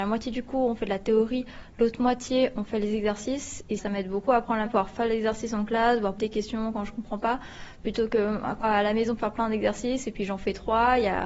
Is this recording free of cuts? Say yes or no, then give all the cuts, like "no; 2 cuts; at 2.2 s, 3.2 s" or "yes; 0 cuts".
no; 4 cuts; at 3.8 s, 4.7 s, 6.2 s, 8.6 s